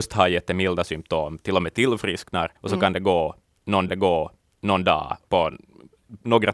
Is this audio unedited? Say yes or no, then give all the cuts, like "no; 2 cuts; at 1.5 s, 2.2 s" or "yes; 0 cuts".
no; 3 cuts; at 2.6 s, 3.9 s, 5.3 s